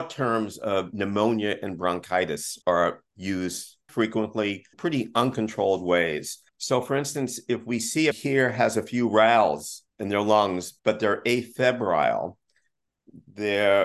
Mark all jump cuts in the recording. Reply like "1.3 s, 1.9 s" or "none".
2.6 s, 3.9 s, 4.7 s, 6.5 s, 8.1 s, 9.9 s, 10.8 s